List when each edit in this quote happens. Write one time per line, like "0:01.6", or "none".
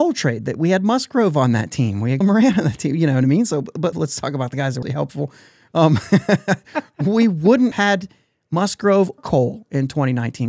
0:02.2
0:03.9
0:04.8
0:07.7
0:09.2